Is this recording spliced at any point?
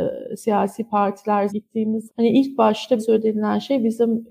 yes; 3 cuts; at 1.5 s, 2.1 s, 3.0 s

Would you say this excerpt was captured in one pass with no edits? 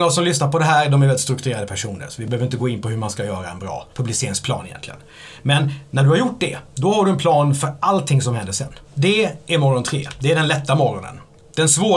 no; 2 cuts; at 3.9 s, 8.8 s

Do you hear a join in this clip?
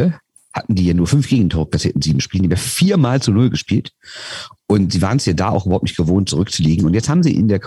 no; 0 cuts

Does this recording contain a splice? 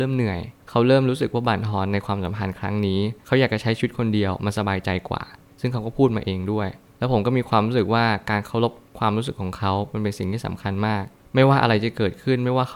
no; 0 cuts

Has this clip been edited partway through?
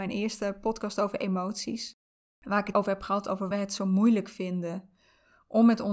yes; 3 cuts; at 2.1 s, 2.7 s, 3.5 s

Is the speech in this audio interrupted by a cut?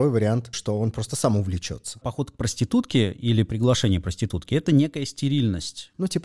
no; 0 cuts

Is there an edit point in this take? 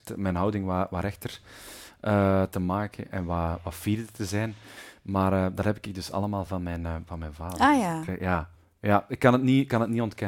no; 0 cuts

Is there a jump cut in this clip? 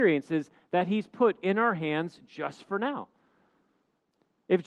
no; 0 cuts

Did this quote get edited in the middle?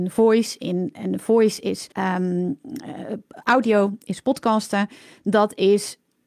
yes; 1 cut; at 1.9 s

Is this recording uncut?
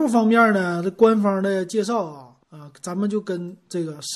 no; 1 cut; at 2.4 s

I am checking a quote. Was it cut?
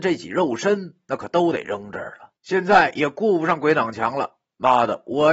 yes; 1 cut; at 2.4 s

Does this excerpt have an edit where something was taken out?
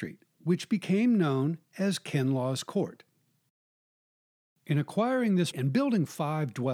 yes; 1 cut; at 5.5 s

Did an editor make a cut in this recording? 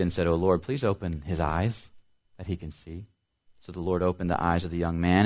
no; 0 cuts

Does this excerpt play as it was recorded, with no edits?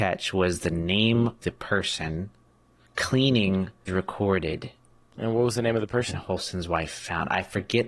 no; 3 cuts; at 1.4 s, 2.9 s, 3.9 s

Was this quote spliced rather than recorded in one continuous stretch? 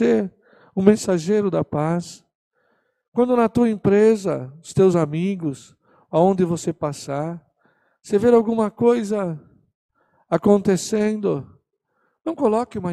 no; 0 cuts

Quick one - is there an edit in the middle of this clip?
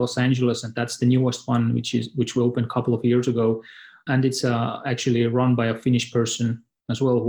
no; 0 cuts

